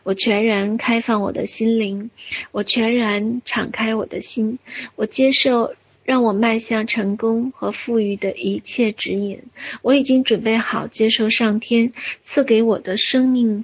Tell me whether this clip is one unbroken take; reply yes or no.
yes